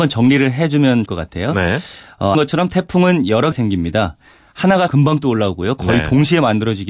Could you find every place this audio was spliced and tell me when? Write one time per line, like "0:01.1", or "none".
0:01.1
0:02.3
0:03.5
0:04.9